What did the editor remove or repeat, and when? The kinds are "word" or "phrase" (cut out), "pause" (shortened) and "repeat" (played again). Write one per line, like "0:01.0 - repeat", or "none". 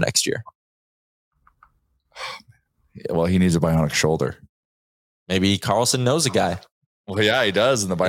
none